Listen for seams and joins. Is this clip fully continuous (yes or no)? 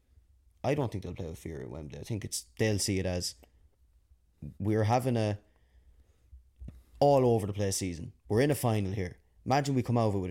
no